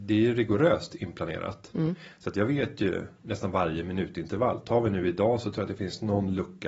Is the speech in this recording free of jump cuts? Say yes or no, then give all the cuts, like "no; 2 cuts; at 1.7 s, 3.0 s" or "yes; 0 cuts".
yes; 0 cuts